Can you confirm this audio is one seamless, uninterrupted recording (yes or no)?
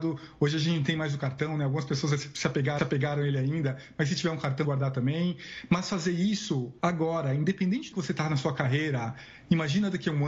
no